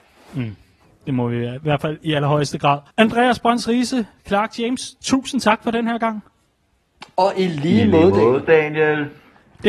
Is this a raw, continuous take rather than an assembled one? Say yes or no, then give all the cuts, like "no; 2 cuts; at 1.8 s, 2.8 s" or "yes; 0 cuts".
no; 1 cut; at 2.9 s